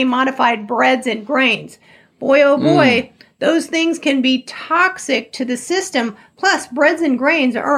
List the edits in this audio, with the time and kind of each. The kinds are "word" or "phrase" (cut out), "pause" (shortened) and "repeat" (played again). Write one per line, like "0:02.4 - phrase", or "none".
none